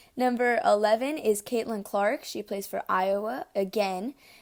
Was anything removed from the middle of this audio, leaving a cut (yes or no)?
no